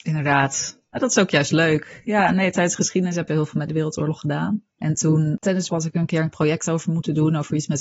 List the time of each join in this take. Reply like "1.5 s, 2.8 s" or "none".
3.3 s, 3.7 s, 4.7 s, 5.7 s, 6.3 s